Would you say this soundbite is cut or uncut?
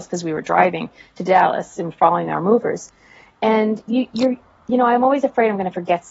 uncut